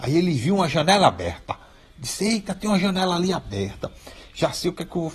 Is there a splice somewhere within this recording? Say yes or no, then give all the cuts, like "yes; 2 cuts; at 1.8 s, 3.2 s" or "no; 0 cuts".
no; 0 cuts